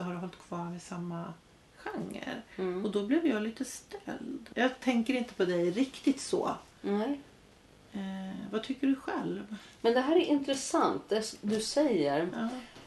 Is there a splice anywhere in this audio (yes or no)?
no